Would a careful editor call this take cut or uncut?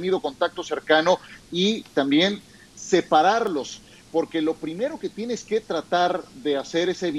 uncut